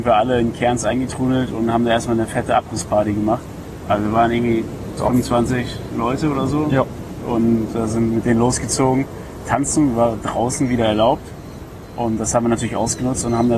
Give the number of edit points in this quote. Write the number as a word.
zero